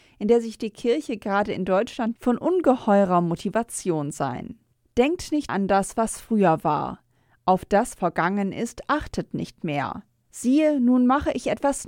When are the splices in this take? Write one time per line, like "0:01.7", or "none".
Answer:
0:02.2
0:05.5
0:08.0